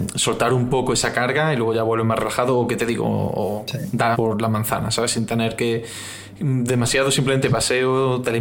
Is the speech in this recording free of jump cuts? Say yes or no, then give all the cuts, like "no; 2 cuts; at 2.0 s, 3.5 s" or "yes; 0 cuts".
no; 2 cuts; at 4.1 s, 7.4 s